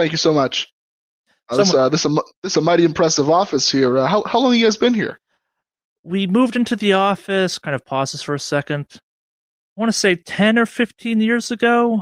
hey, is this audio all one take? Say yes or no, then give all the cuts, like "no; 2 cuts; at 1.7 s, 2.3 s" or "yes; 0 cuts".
yes; 0 cuts